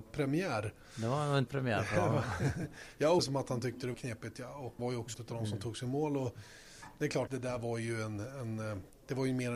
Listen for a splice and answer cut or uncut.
cut